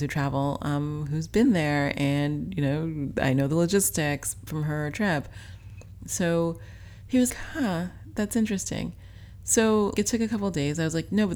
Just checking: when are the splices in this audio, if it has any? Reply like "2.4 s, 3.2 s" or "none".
4.5 s, 7.3 s, 10.0 s